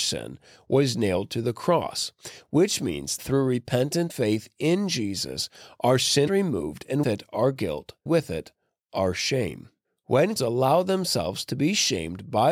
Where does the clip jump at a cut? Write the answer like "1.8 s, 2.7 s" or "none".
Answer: 3.2 s, 4.1 s, 6.3 s, 7.0 s, 8.1 s, 10.4 s